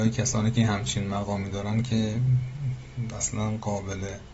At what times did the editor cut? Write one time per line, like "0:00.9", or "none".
none